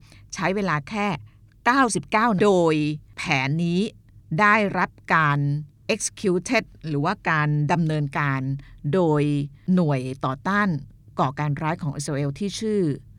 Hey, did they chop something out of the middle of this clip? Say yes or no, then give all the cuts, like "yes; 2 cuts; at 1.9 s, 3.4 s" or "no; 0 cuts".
yes; 1 cut; at 2.4 s